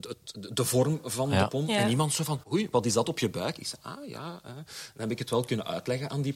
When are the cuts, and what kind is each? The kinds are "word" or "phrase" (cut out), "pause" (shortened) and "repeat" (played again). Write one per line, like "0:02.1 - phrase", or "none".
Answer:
0:02.4 - pause

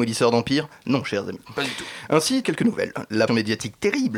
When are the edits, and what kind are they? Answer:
0:02.4 - phrase
0:03.3 - phrase

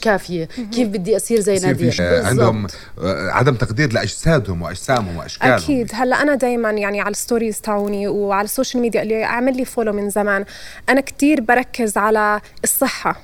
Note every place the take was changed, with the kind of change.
0:02.0 - phrase
0:05.9 - word

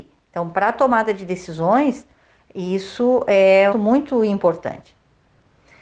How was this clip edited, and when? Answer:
0:03.7 - phrase

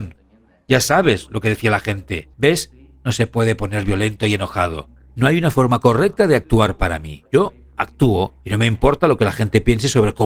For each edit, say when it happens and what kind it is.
0:02.3 - pause
0:07.3 - pause
0:08.4 - pause

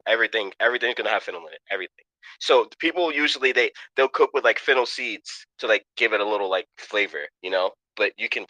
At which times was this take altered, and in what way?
0:05.5 - pause
0:07.3 - pause

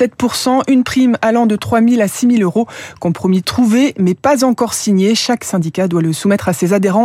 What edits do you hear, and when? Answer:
none

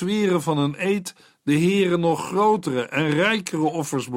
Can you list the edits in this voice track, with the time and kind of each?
none

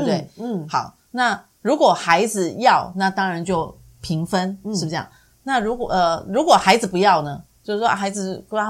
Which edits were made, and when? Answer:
none

